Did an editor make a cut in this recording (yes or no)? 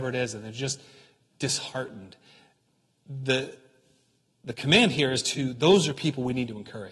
no